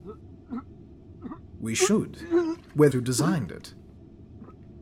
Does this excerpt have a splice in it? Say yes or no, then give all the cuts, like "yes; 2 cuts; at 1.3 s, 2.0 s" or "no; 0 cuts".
yes; 1 cut; at 2.9 s